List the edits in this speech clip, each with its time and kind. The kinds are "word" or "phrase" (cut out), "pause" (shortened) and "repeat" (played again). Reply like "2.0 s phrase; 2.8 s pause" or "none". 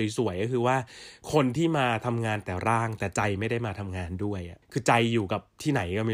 4.6 s pause